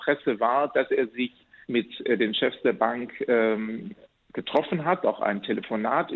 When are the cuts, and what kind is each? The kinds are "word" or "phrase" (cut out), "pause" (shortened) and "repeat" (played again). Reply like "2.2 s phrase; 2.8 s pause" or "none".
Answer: 1.6 s word

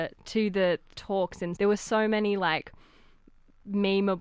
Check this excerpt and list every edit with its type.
0.9 s word; 1.6 s word

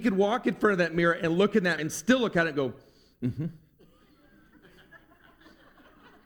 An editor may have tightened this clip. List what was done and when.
1.8 s word

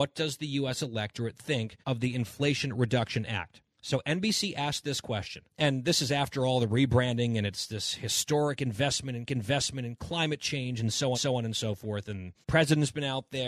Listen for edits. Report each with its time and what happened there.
1.8 s pause; 3.7 s pause; 5.5 s pause; 9.3 s repeat; 11.1 s repeat; 12.4 s pause

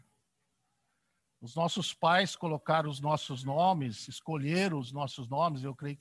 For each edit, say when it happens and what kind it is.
none

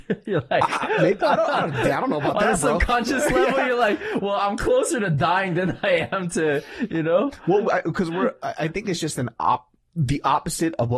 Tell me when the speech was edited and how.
none

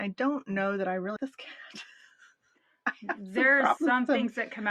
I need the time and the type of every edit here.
1.2 s word; 3.8 s word

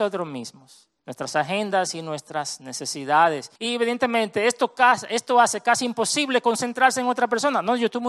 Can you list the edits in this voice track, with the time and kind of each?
1.0 s pause; 3.6 s pause

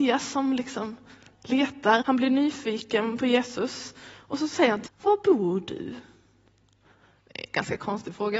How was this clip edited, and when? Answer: 2.0 s word; 4.9 s word

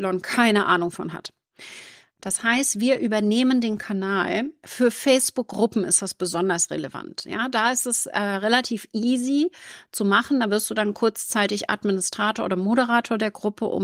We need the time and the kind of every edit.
none

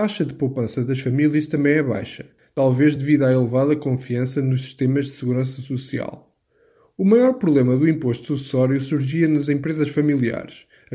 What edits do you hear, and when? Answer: none

